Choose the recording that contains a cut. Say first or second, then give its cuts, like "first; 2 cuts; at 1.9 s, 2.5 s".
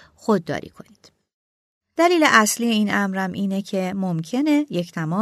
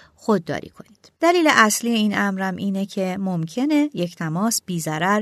second; 1 cut; at 1.2 s